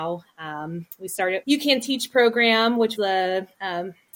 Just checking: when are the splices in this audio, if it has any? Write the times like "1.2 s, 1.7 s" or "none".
1.4 s, 3.0 s

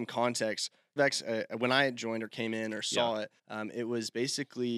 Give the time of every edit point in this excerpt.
1.0 s, 3.4 s

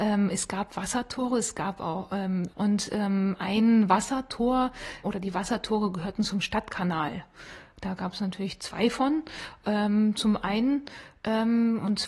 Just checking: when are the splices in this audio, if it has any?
2.5 s, 5.0 s

